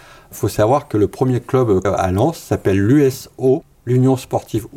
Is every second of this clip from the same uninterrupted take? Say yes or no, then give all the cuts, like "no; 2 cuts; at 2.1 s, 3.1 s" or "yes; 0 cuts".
no; 1 cut; at 1.8 s